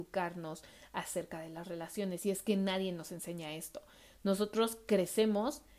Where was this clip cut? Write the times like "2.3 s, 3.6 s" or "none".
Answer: none